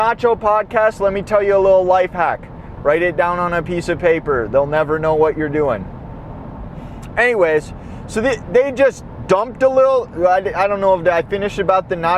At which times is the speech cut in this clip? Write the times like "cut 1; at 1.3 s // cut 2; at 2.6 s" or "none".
none